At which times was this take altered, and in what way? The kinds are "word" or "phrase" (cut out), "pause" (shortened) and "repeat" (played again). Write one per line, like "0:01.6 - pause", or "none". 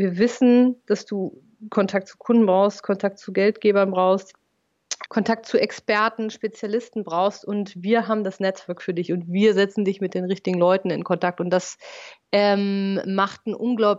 0:05.1 - word